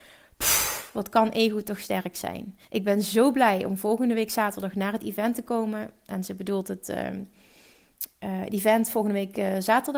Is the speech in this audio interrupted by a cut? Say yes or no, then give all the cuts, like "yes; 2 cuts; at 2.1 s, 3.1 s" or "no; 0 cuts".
yes; 1 cut; at 2.6 s